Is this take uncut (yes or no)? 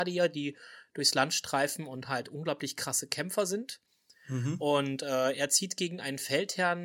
yes